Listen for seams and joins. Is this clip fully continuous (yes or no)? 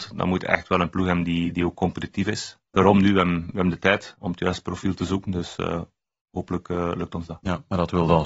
no